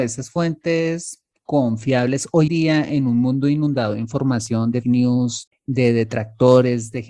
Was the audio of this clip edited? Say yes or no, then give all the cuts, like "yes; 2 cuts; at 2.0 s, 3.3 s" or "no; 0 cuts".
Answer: yes; 3 cuts; at 2.5 s, 4.8 s, 5.5 s